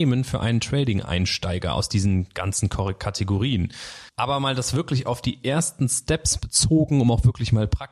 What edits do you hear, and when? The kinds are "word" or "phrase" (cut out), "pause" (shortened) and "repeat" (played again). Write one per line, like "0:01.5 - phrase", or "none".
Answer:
0:04.1 - pause